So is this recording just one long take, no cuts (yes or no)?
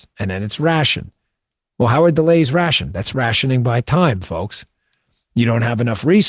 yes